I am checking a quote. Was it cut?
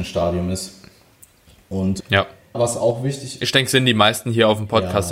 yes; 1 cut; at 2.5 s

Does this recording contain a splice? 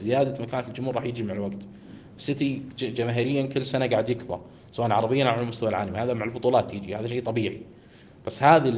no; 0 cuts

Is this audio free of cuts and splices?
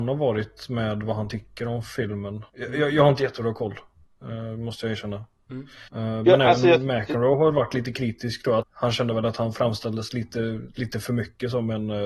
no; 3 cuts; at 2.5 s, 5.9 s, 8.6 s

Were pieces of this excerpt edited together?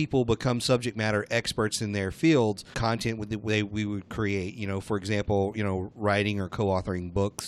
yes; 1 cut; at 2.7 s

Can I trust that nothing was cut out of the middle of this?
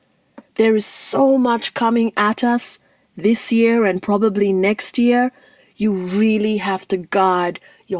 yes; 0 cuts

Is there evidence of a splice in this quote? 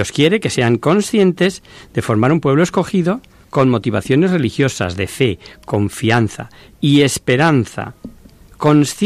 no; 0 cuts

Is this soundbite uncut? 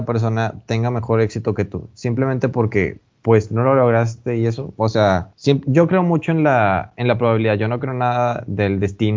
no; 1 cut; at 5.3 s

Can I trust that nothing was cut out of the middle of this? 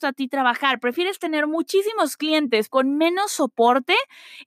no; 1 cut; at 2.7 s

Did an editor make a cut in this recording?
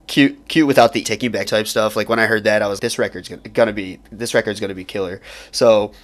yes; 3 cuts; at 1.0 s, 1.4 s, 2.8 s

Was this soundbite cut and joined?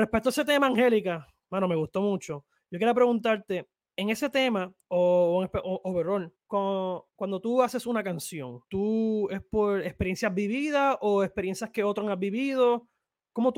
yes; 4 cuts; at 3.8 s, 4.8 s, 6.4 s, 8.6 s

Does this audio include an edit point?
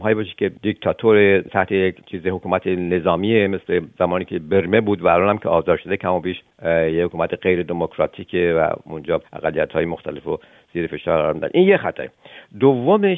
no; 0 cuts

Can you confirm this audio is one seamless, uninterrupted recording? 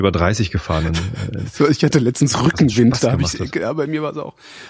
yes; 0 cuts

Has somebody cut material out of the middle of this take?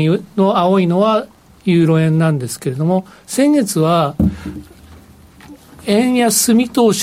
no; 0 cuts

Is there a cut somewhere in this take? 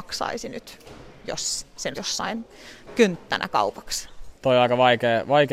yes; 1 cut; at 1.9 s

